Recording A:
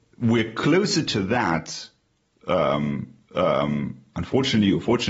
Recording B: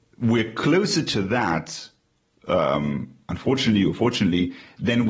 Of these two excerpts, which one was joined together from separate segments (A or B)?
A